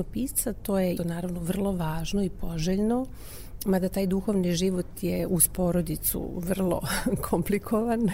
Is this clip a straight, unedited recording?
no; 1 cut; at 1.0 s

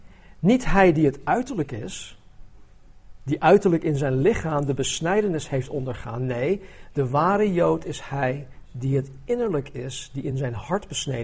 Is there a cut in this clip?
no; 0 cuts

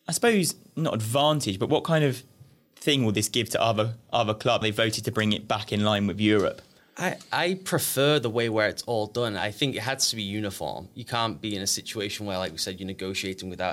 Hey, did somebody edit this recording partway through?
yes; 1 cut; at 4.6 s

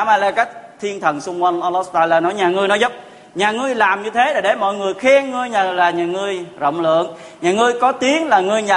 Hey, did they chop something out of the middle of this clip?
no; 0 cuts

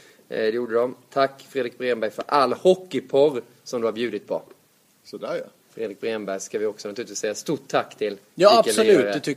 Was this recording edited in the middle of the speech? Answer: no; 0 cuts

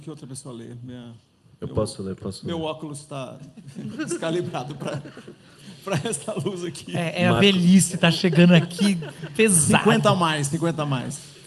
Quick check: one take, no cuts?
yes; 0 cuts

